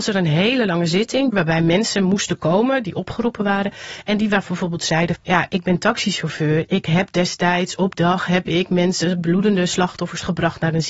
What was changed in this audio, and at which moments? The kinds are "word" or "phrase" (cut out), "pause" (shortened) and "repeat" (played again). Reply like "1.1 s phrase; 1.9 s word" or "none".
5.1 s word; 7.9 s word